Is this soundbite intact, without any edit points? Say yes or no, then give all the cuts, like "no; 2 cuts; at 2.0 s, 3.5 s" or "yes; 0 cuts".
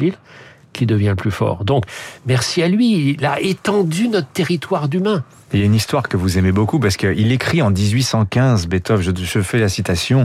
yes; 0 cuts